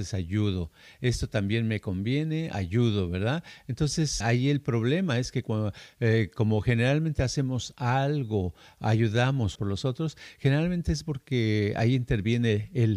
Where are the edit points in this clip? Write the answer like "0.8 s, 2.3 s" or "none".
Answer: 4.2 s, 9.6 s